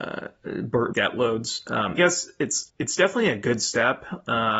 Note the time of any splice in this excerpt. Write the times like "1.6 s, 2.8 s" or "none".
0.9 s, 1.9 s, 2.7 s